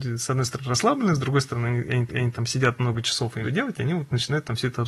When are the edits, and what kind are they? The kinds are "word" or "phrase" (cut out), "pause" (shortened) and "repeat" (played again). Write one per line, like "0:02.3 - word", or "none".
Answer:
0:02.1 - repeat
0:03.4 - word